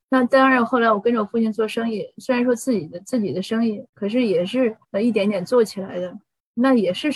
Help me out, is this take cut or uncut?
cut